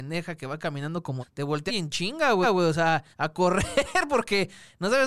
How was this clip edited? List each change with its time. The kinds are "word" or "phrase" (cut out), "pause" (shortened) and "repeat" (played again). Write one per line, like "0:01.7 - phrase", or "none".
0:01.2 - word
0:01.7 - phrase
0:02.4 - repeat
0:03.1 - pause